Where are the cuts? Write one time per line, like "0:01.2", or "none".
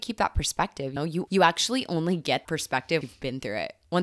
0:01.0
0:01.3
0:02.4
0:03.0